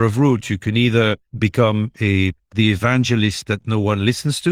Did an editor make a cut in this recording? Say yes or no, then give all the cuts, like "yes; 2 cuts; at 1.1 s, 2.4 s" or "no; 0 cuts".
yes; 1 cut; at 1.3 s